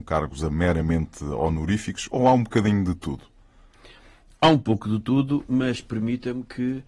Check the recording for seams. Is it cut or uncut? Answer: uncut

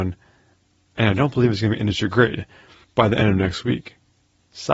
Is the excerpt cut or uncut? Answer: uncut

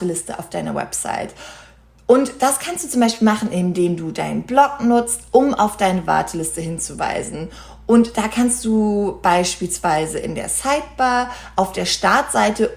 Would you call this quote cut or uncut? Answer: uncut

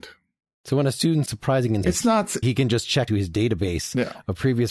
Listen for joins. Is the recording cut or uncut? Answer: cut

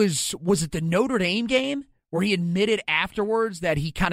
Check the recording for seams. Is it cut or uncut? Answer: uncut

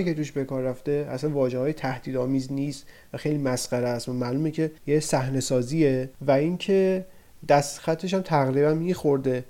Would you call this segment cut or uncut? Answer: cut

